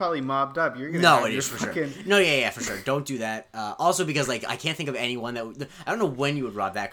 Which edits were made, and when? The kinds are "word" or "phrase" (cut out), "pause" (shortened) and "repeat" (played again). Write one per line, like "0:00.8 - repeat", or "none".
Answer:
none